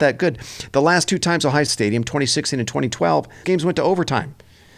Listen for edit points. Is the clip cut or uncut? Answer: cut